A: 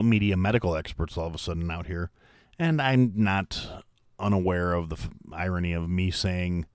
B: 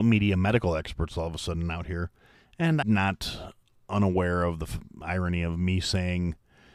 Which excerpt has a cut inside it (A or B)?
B